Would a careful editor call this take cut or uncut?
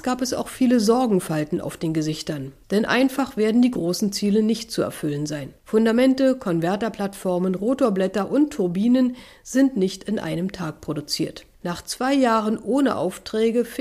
cut